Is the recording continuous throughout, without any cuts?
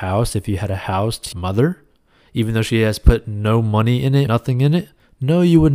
no; 2 cuts; at 1.3 s, 4.3 s

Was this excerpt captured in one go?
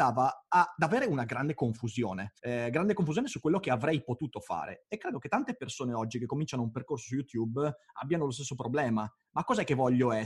no; 1 cut; at 2.4 s

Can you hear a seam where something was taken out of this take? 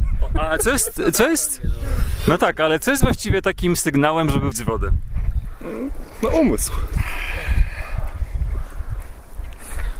yes; 1 cut; at 4.5 s

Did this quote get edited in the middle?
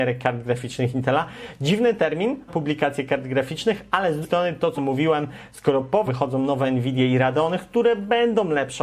yes; 4 cuts; at 2.5 s, 4.2 s, 4.8 s, 6.1 s

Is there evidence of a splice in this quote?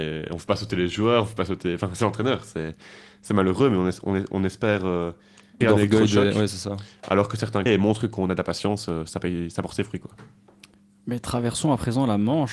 yes; 2 cuts; at 5.6 s, 7.7 s

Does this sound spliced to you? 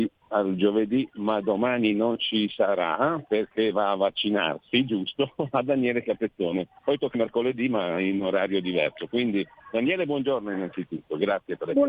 yes; 2 cuts; at 6.8 s, 7.1 s

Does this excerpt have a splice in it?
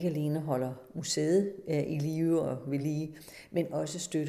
no; 0 cuts

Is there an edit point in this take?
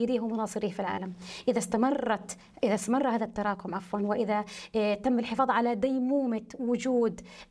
no; 0 cuts

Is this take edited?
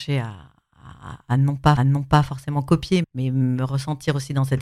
yes; 2 cuts; at 1.8 s, 3.0 s

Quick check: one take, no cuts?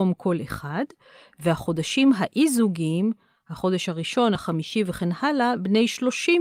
no; 1 cut; at 4.4 s

